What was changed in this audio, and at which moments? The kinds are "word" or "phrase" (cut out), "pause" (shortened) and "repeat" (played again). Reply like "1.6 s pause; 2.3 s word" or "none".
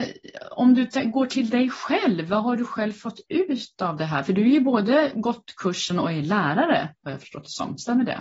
none